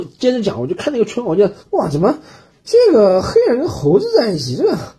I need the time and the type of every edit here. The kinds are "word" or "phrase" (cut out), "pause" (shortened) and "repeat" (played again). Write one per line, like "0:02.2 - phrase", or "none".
0:01.6 - pause

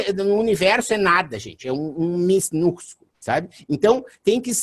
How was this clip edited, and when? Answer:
0:03.1 - pause

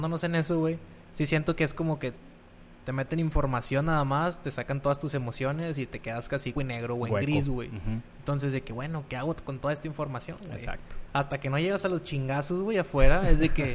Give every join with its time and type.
0:06.6 - phrase

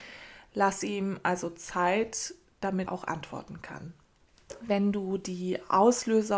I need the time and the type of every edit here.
0:02.9 - phrase

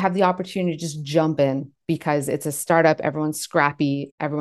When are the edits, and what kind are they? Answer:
none

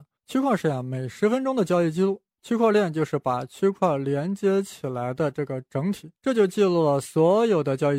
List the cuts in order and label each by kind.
0:02.3 - pause
0:06.2 - pause

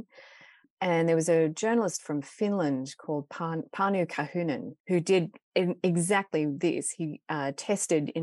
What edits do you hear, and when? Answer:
0:04.8 - pause
0:05.4 - pause

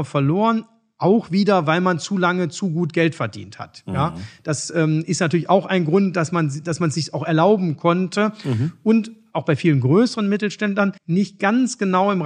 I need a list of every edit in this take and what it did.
0:11.0 - pause

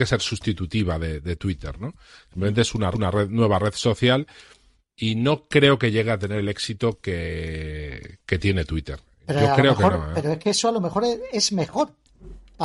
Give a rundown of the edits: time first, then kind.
0:02.9 - repeat

